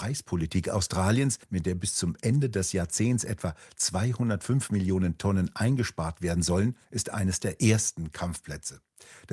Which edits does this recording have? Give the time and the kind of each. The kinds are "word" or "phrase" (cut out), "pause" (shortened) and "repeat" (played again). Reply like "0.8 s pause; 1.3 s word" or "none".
1.4 s pause; 6.8 s pause